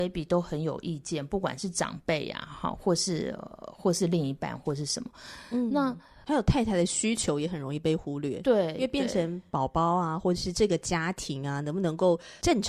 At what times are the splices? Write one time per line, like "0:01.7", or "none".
none